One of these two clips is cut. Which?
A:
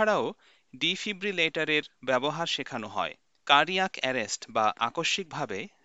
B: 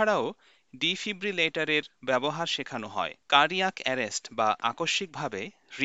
B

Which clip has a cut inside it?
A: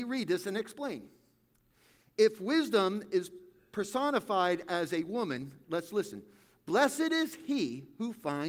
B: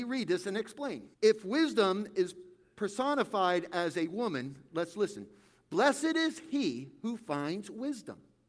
B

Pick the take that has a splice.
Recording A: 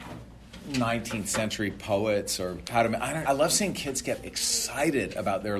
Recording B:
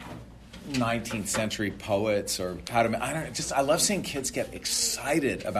A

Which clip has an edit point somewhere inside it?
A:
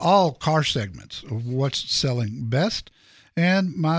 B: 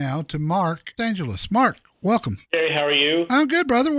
B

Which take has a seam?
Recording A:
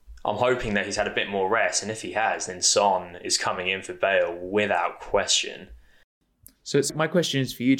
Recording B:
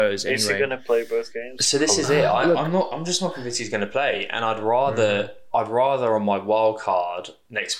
A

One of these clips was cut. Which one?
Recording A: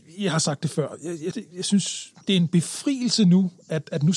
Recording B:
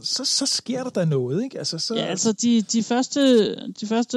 A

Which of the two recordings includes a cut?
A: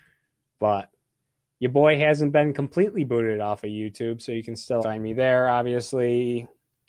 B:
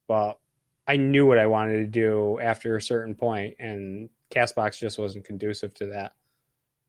A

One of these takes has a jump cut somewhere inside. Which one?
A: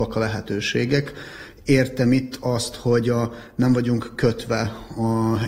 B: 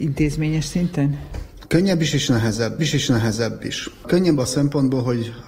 B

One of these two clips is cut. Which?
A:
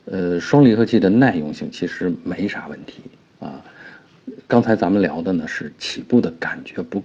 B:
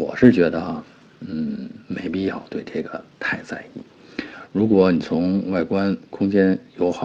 A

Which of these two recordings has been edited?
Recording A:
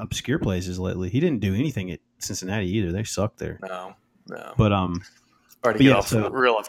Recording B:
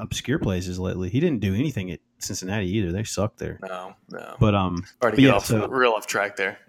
B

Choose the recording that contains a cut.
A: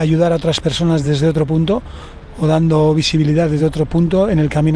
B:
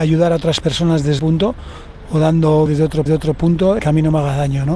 B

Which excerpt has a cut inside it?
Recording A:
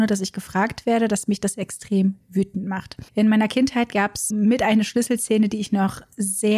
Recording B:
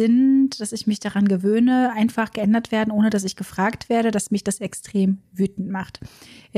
A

